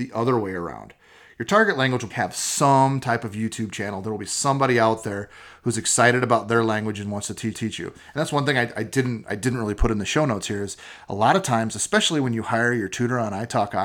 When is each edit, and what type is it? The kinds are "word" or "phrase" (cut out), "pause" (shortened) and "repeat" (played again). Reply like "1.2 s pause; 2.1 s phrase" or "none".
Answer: 2.1 s word; 7.5 s repeat